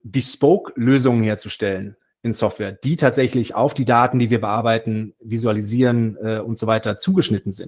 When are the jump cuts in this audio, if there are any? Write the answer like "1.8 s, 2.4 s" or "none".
none